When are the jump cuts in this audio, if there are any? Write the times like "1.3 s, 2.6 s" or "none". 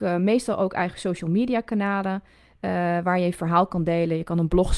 none

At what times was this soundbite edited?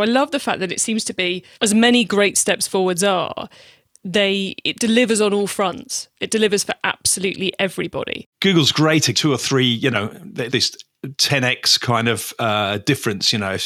1.5 s, 8.3 s, 9.1 s, 10.5 s

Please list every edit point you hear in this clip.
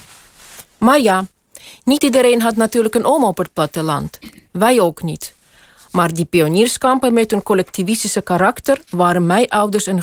none

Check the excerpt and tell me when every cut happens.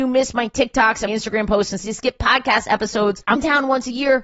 1.1 s, 1.8 s, 3.3 s

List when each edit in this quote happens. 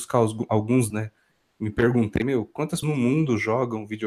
0.9 s, 2.2 s, 2.8 s

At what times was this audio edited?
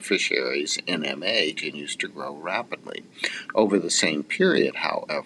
1.6 s

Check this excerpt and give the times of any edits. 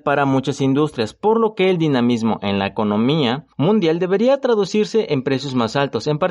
3.5 s

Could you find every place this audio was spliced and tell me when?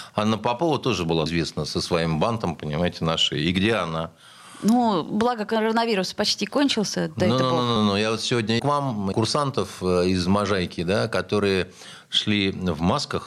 1.3 s, 7.8 s, 8.6 s, 9.1 s

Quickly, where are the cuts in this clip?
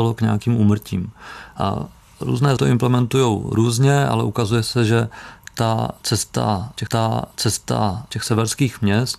2.6 s, 6.9 s

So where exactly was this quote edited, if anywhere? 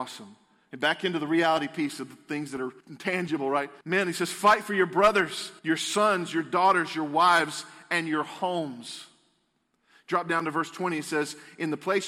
2.8 s, 3.8 s, 5.6 s

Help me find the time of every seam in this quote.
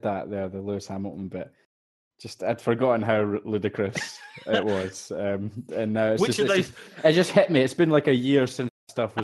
none

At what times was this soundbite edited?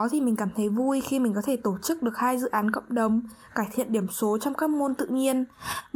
none

